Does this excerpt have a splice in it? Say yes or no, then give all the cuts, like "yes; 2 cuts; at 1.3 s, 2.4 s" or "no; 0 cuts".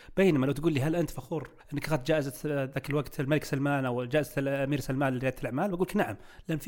yes; 1 cut; at 1.6 s